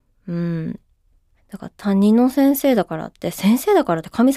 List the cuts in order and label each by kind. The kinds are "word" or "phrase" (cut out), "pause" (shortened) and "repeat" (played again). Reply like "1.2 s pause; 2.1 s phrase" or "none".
none